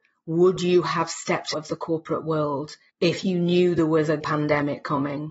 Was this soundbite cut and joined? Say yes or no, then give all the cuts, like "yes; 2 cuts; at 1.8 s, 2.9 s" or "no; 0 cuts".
yes; 2 cuts; at 1.5 s, 4.2 s